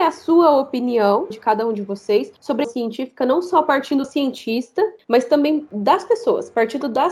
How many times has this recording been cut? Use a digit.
3